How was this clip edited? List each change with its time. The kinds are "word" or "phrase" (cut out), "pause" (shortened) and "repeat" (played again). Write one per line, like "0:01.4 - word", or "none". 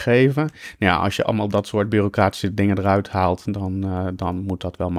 none